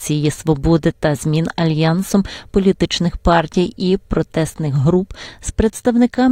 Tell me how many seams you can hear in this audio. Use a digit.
0